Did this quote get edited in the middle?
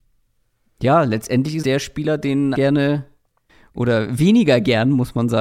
yes; 2 cuts; at 1.6 s, 2.5 s

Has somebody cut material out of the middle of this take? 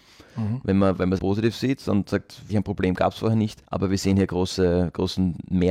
yes; 3 cuts; at 1.2 s, 2.5 s, 3.6 s

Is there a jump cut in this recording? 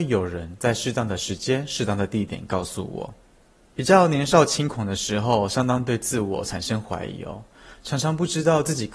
no; 0 cuts

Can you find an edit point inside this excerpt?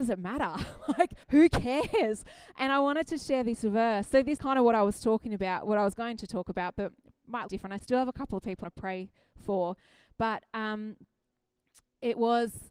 yes; 4 cuts; at 1.2 s, 4.4 s, 7.5 s, 8.6 s

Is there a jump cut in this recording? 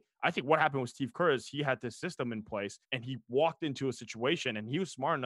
yes; 1 cut; at 2.8 s

